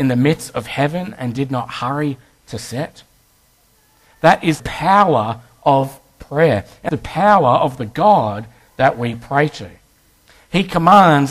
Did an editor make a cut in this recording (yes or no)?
yes